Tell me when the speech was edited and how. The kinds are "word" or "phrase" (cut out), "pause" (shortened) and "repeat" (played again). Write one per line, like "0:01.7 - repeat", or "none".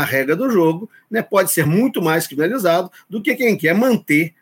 none